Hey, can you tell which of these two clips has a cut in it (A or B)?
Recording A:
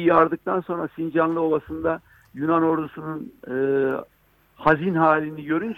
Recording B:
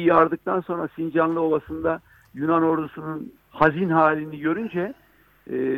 B